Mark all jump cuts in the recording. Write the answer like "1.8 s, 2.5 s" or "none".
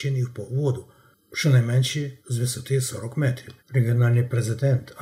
2.2 s, 3.6 s